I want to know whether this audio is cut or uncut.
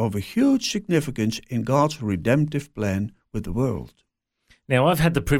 uncut